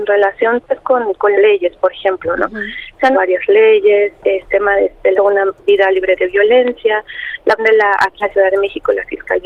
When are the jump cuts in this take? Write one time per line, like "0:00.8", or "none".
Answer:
0:01.3
0:03.1
0:04.5
0:05.2
0:07.6
0:08.2